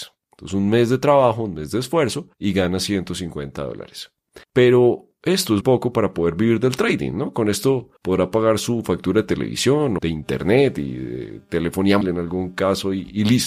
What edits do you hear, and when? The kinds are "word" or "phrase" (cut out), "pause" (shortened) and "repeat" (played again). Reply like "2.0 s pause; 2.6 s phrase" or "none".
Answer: 2.3 s pause; 4.4 s pause; 5.6 s word; 8.0 s pause; 10.0 s word; 12.0 s word